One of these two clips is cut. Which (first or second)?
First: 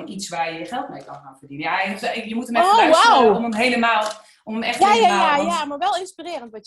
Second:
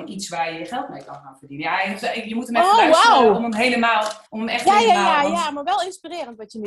second